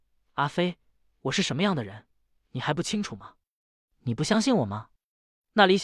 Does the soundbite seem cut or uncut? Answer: uncut